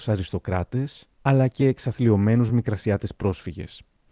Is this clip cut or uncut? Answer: uncut